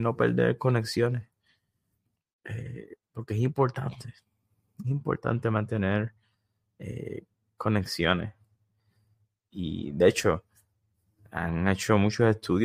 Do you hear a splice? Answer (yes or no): no